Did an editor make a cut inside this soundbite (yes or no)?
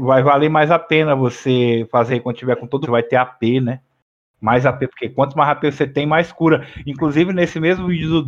yes